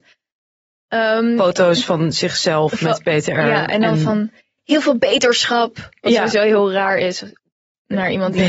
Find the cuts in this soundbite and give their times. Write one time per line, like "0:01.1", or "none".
none